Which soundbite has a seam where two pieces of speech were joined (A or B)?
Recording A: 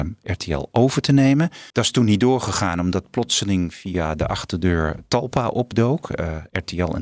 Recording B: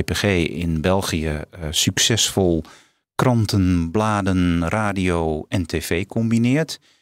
A